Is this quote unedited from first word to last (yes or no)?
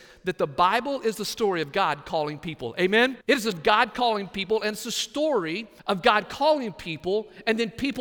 no